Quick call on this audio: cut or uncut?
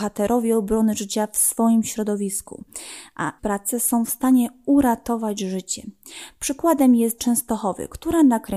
cut